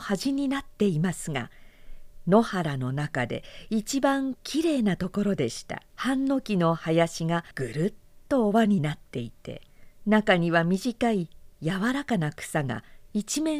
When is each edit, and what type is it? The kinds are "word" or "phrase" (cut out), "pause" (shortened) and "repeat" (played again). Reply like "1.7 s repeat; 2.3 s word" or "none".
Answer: 5.9 s pause; 7.5 s pause; 10.0 s pause; 11.5 s pause